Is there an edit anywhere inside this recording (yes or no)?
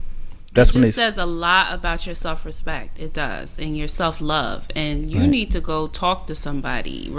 no